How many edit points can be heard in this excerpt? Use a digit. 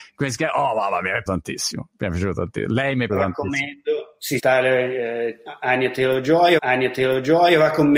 4